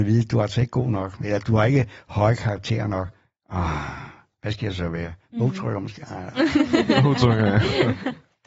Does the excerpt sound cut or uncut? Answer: uncut